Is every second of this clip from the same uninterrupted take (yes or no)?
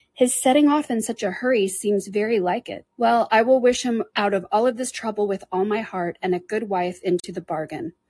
no